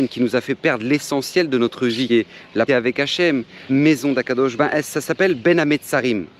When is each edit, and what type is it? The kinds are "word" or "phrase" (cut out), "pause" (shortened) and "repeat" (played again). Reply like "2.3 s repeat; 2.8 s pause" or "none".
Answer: 2.1 s word; 2.7 s word; 3.7 s word; 4.6 s phrase